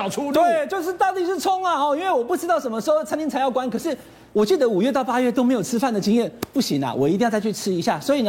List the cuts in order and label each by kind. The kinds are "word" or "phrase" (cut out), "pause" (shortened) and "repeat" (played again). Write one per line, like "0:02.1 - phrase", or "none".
none